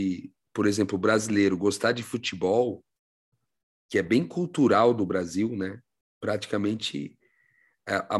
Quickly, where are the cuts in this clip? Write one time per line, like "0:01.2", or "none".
none